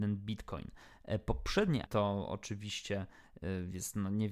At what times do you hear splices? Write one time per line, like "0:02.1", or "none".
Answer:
0:01.9